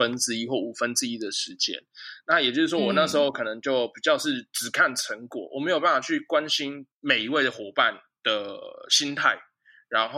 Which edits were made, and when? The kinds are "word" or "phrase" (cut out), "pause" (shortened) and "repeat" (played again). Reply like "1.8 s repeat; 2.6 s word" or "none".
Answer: 6.9 s pause

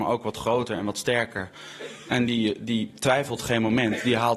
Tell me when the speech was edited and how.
none

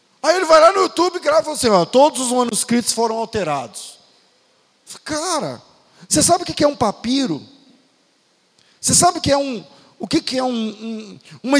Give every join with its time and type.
none

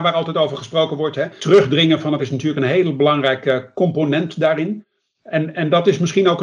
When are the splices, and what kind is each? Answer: 1.4 s word; 2.2 s word

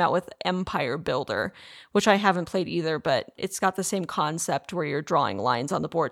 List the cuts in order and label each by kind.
3.4 s word

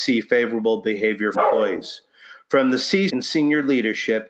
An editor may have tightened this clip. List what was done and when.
1.3 s word; 3.1 s word

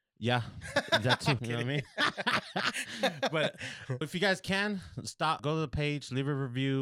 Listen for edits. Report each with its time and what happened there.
1.4 s word; 4.0 s word; 5.4 s word

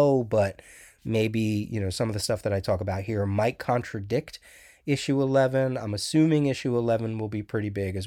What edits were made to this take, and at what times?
none

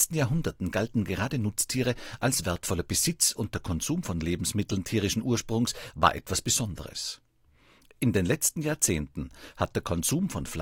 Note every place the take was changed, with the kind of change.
none

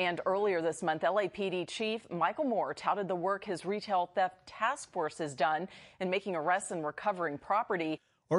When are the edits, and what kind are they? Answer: none

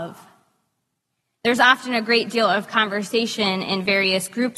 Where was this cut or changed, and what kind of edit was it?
none

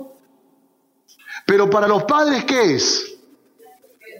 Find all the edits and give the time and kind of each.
none

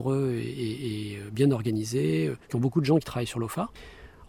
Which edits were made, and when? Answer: 2.4 s pause

